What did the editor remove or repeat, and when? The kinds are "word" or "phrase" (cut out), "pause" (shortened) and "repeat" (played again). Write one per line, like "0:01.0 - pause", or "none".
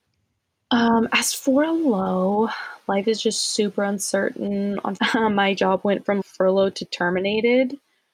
0:05.0 - word
0:06.2 - word

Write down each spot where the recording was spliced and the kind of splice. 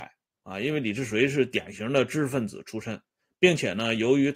none

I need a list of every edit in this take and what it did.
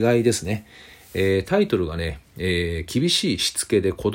none

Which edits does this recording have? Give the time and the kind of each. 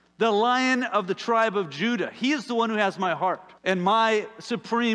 0:03.6 - pause

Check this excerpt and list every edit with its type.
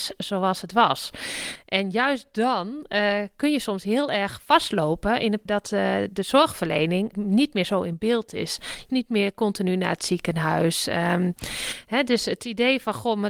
0:05.5 - word
0:07.1 - word
0:08.9 - word

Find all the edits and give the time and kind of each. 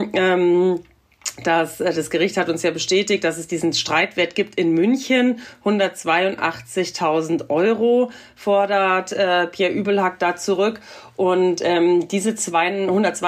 none

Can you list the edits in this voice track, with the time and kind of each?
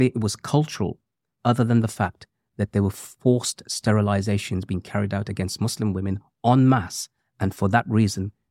none

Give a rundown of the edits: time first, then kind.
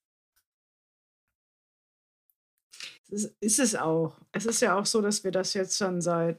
0:03.0 - pause

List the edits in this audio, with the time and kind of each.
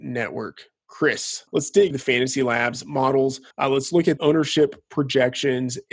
0:01.5 - pause
0:01.9 - word
0:03.5 - pause
0:04.2 - word

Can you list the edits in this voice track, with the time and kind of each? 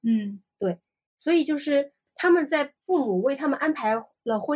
0:02.8 - pause

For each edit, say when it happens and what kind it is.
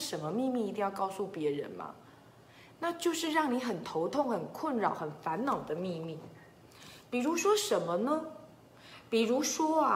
none

